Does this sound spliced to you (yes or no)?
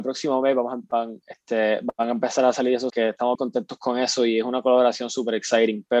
yes